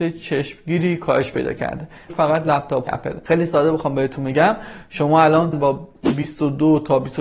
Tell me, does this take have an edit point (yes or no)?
yes